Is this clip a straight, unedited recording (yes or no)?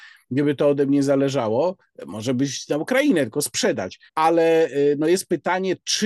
no